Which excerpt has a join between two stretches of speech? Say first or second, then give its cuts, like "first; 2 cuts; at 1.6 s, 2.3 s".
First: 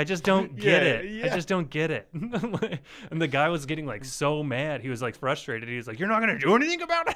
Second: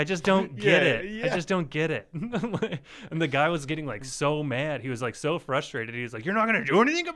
first; 1 cut; at 5.1 s